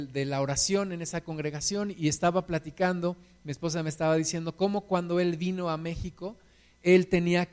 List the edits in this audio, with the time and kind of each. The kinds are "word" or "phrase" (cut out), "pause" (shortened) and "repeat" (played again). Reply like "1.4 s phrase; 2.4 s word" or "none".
none